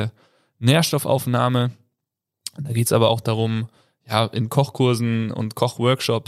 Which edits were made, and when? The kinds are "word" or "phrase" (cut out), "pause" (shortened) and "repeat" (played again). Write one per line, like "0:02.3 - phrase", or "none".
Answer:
none